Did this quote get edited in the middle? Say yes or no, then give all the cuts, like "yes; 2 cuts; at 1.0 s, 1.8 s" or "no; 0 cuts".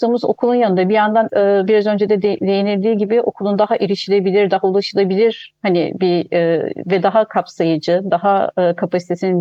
yes; 1 cut; at 1.3 s